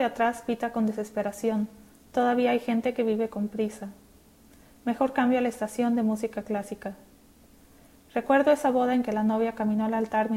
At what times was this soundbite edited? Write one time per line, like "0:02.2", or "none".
none